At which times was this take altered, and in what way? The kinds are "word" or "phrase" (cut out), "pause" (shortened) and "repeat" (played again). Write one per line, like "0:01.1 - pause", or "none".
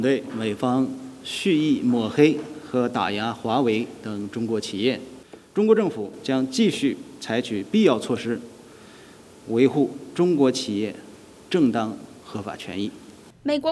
none